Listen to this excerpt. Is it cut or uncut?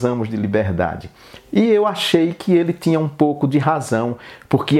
uncut